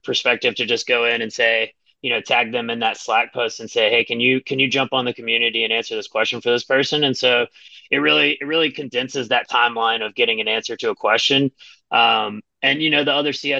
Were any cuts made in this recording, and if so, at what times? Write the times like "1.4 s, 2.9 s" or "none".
none